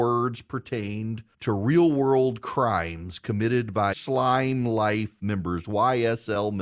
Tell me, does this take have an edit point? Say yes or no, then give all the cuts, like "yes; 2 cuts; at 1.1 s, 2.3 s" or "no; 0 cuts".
yes; 2 cuts; at 1.3 s, 3.9 s